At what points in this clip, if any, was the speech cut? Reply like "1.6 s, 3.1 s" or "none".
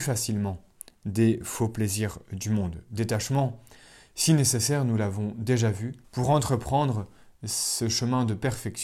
6.0 s